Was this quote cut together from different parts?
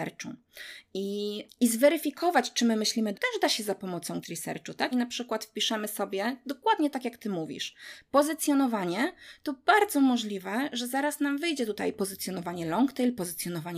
yes; 4 cuts; at 1.5 s, 3.1 s, 4.2 s, 4.9 s

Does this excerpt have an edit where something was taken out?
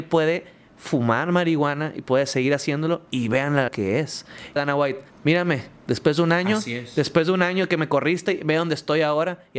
yes; 4 cuts; at 3.1 s, 3.7 s, 4.6 s, 5.1 s

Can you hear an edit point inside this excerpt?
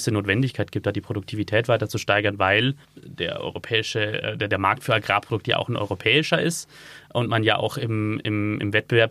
yes; 1 cut; at 2.8 s

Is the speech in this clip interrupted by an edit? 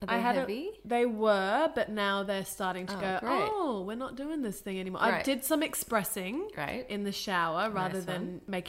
no; 0 cuts

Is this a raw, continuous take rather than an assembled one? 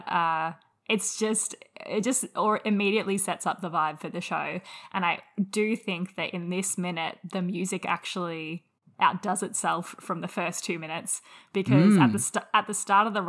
yes; 0 cuts

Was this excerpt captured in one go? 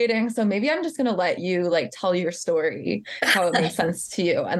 yes; 0 cuts

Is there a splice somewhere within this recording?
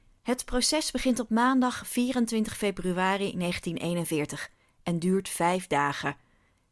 no; 0 cuts

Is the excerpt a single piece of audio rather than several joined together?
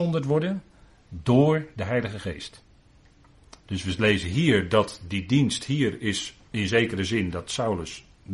no; 1 cut; at 3.6 s

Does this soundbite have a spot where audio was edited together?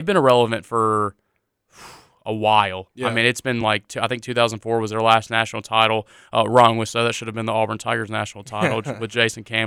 no; 0 cuts

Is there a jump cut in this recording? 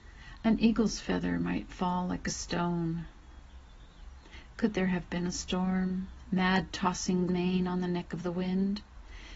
yes; 1 cut; at 7.3 s

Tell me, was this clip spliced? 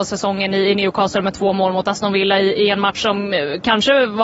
no; 0 cuts

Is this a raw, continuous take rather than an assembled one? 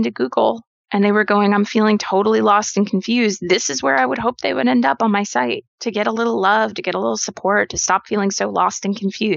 no; 1 cut; at 5.7 s

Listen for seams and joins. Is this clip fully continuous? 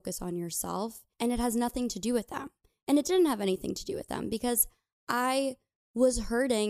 yes; 0 cuts

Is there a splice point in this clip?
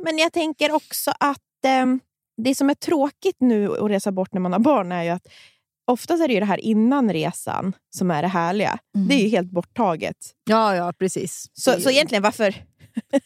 no; 0 cuts

